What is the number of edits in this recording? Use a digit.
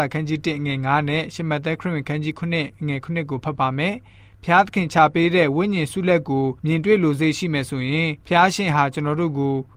2